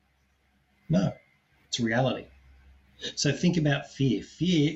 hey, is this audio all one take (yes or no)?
yes